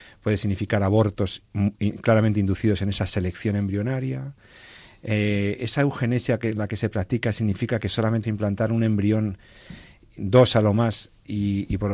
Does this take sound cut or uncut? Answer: cut